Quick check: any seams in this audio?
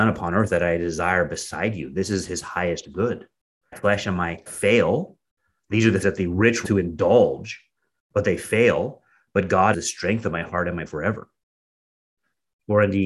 yes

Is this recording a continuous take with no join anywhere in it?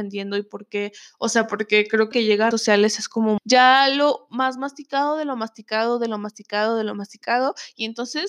no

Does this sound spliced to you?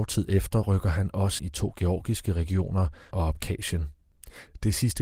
yes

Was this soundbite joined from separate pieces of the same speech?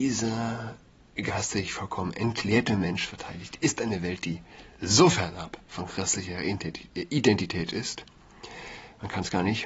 no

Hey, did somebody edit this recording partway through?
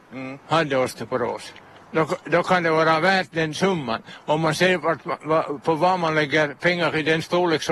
no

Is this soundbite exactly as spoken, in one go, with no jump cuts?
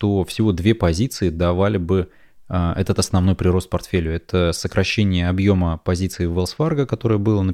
yes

